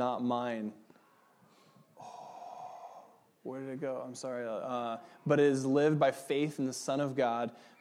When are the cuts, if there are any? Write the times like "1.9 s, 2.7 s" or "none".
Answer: none